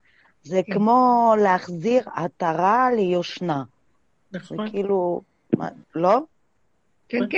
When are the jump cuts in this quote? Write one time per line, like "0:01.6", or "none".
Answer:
none